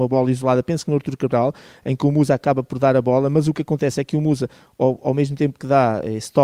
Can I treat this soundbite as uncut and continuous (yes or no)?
yes